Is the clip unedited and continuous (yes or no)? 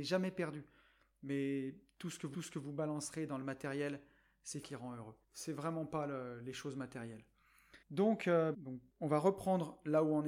no